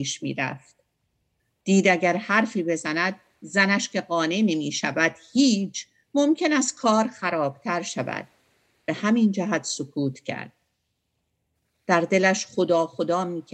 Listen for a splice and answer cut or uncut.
uncut